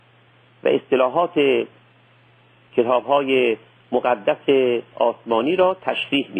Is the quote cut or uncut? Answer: uncut